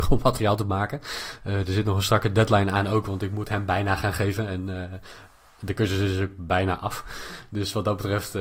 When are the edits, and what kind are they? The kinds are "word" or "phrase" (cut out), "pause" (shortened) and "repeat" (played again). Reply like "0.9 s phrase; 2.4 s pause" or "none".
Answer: none